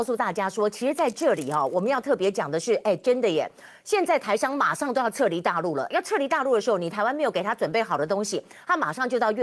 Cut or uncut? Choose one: uncut